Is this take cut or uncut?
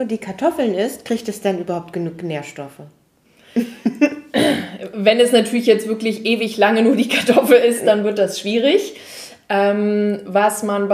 uncut